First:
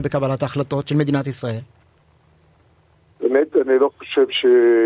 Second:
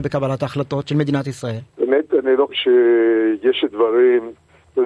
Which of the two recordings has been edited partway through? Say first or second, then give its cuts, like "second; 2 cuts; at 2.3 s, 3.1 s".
second; 2 cuts; at 1.7 s, 2.5 s